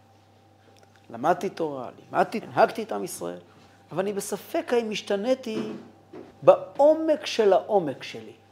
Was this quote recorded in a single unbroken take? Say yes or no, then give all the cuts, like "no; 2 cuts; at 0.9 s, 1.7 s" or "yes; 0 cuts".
no; 3 cuts; at 2.4 s, 3.7 s, 6.3 s